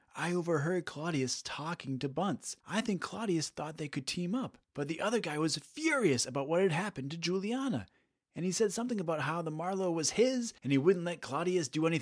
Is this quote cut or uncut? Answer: cut